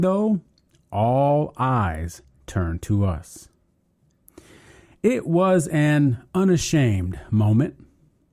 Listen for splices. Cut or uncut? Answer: uncut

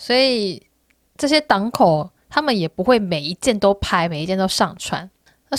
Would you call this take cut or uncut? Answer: uncut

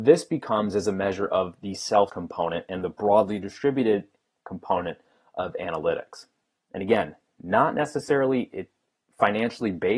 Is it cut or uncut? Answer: cut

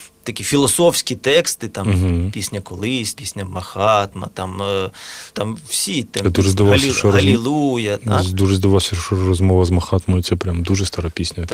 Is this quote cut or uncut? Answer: cut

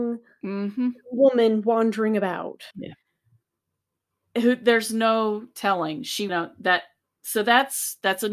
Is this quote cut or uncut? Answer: cut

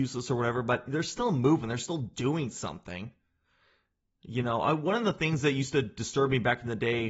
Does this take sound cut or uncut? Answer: uncut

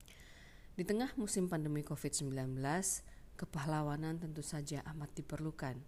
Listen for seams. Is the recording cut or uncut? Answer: uncut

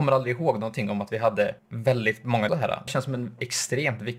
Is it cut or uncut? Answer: cut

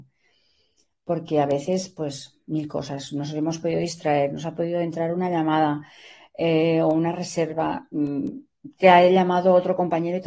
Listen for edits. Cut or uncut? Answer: uncut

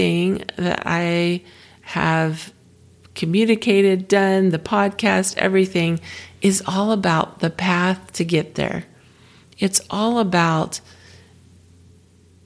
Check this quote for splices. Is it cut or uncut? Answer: uncut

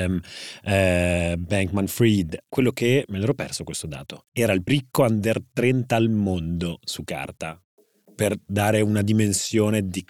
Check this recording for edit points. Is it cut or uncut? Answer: cut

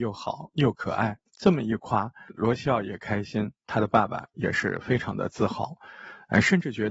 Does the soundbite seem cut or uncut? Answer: cut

